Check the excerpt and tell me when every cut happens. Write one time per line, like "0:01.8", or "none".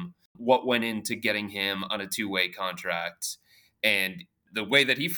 none

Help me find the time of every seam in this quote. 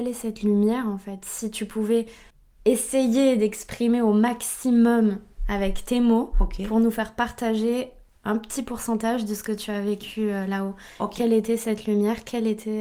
0:02.3

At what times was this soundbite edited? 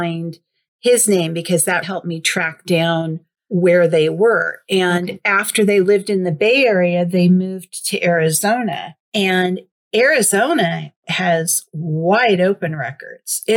0:01.8

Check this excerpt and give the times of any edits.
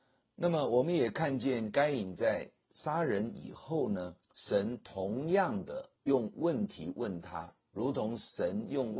0:02.6
0:04.2
0:06.0

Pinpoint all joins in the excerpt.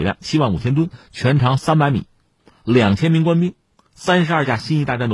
none

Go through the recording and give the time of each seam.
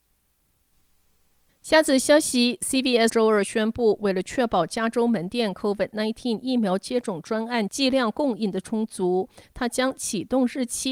0:03.1

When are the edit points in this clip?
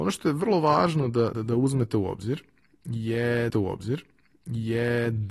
0:01.3
0:03.5

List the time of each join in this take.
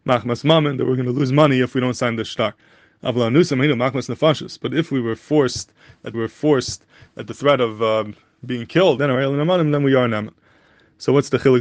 0:06.1
0:09.0

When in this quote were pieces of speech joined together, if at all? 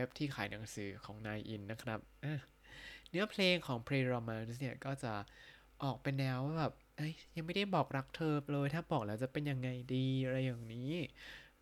none

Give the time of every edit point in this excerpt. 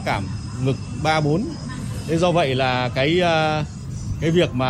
none

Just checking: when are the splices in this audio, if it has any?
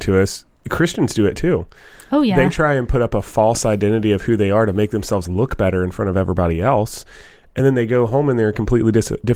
none

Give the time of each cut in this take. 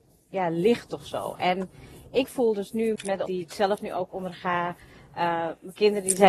0:03.0
0:03.3

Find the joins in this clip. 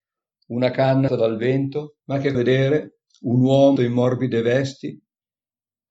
0:01.1
0:02.0
0:02.3
0:03.8

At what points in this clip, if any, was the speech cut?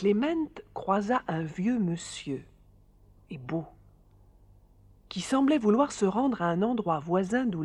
0:03.2

